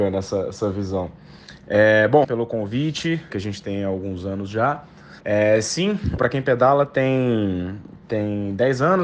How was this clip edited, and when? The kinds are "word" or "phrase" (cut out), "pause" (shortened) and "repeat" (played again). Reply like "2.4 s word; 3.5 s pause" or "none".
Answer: 2.2 s phrase; 3.3 s phrase; 5.2 s pause; 6.2 s word